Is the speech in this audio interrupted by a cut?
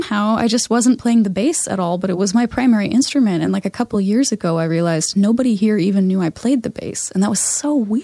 no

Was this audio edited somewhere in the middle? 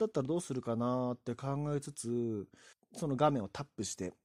yes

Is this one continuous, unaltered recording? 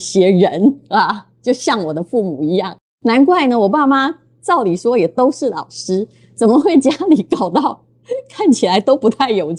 yes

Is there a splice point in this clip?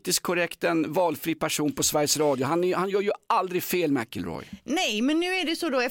no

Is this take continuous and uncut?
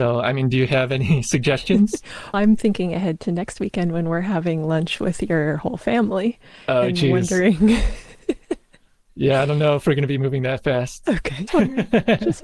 no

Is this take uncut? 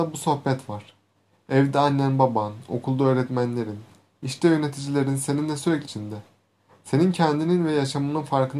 no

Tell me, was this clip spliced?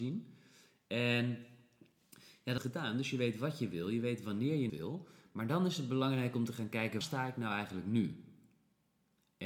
yes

